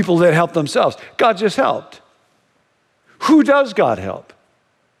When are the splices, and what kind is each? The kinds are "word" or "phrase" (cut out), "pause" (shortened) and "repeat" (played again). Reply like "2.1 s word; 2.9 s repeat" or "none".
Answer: none